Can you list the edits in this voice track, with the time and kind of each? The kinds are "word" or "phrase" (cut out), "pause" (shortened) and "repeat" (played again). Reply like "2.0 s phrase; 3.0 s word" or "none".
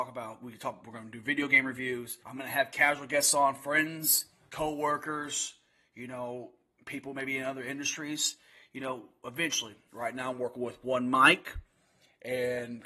2.2 s pause